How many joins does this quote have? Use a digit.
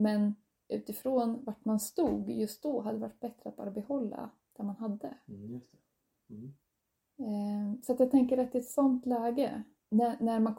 0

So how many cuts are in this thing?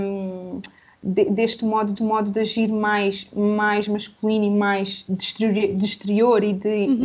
2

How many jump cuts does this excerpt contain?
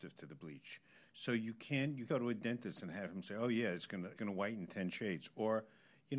2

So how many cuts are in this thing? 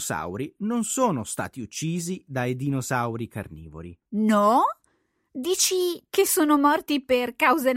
1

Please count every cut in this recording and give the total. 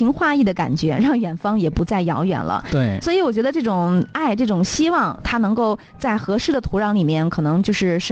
1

